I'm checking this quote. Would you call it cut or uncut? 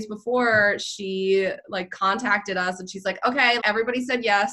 cut